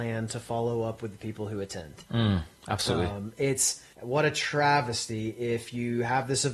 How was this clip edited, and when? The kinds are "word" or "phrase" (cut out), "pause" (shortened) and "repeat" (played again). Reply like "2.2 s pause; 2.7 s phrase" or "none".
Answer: 3.9 s pause